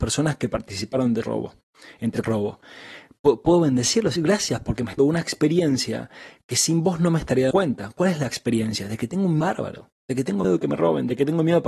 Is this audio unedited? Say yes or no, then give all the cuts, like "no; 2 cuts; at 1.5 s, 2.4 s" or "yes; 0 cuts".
no; 7 cuts; at 1.2 s, 2.2 s, 4.2 s, 5.0 s, 7.5 s, 9.4 s, 10.4 s